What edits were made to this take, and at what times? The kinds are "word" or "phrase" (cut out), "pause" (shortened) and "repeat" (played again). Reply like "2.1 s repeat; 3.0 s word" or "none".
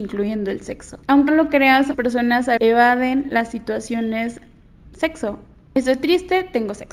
1.3 s word; 1.9 s word; 2.6 s word; 4.8 s word